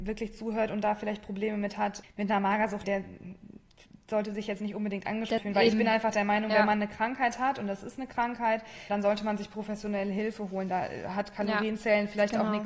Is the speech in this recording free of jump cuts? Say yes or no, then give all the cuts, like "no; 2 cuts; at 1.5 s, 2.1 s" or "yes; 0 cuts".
no; 2 cuts; at 2.8 s, 5.4 s